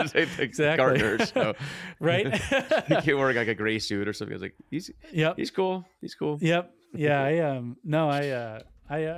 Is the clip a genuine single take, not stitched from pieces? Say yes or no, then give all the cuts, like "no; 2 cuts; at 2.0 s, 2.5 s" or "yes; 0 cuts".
yes; 0 cuts